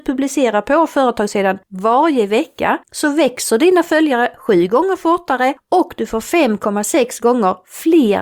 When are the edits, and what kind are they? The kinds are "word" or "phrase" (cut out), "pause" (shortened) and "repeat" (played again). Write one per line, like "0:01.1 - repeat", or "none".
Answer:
0:01.6 - pause
0:02.8 - pause